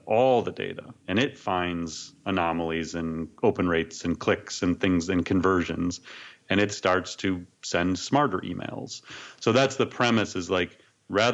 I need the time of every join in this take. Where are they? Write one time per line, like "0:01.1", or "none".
0:01.0
0:03.3
0:07.5